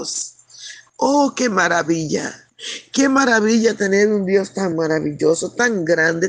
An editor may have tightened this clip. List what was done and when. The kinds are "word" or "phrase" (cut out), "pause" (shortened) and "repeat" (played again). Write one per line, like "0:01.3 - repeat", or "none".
none